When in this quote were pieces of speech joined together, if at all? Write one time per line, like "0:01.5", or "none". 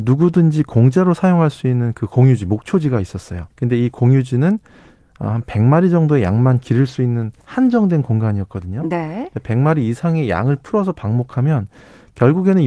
0:03.5
0:07.4